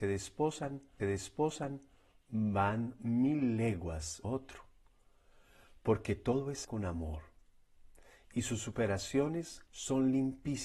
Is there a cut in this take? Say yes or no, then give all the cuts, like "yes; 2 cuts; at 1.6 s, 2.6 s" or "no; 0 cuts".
yes; 4 cuts; at 1.0 s, 4.2 s, 6.6 s, 9.7 s